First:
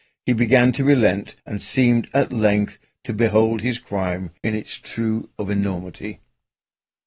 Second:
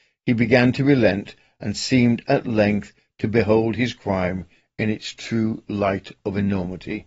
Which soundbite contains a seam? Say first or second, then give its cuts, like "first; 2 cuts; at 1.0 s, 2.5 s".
first; 3 cuts; at 1.4 s, 4.4 s, 5.3 s